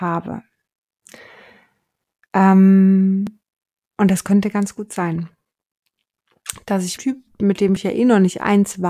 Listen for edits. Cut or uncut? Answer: cut